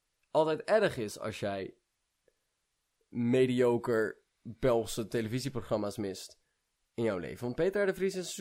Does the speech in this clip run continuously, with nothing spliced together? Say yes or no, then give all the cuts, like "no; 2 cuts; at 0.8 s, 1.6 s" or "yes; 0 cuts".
yes; 0 cuts